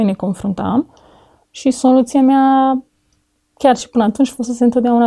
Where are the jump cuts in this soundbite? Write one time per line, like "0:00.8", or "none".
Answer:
none